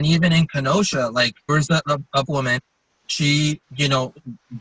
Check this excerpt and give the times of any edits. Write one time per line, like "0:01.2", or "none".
0:01.5
0:02.3
0:03.6